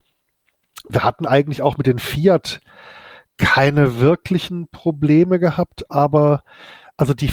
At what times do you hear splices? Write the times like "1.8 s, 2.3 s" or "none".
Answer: none